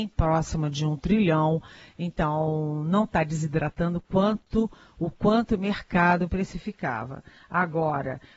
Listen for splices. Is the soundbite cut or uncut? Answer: uncut